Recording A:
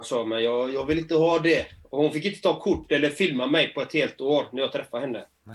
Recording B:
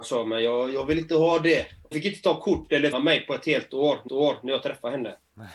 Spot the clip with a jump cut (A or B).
B